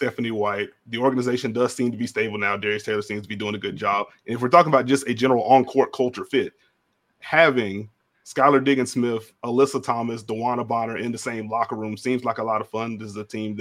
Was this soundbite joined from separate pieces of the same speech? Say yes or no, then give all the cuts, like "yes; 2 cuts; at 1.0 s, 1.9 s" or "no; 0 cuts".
no; 0 cuts